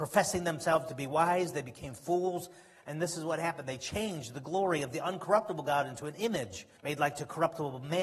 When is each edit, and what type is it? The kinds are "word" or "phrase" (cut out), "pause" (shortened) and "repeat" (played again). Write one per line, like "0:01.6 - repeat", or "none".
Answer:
0:06.8 - pause